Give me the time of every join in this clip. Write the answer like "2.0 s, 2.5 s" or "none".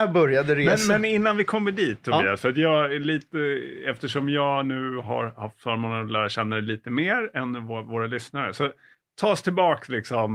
8.9 s